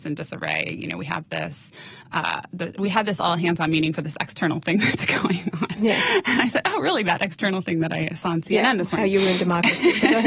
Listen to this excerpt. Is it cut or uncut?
uncut